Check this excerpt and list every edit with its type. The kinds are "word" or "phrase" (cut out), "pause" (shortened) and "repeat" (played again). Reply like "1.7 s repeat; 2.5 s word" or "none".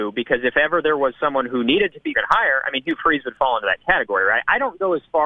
2.1 s phrase